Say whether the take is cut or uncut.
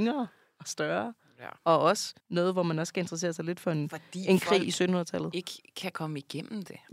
cut